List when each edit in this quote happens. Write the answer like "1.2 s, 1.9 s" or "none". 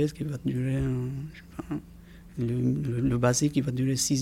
none